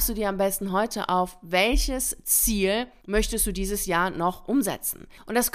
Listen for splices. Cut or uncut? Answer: uncut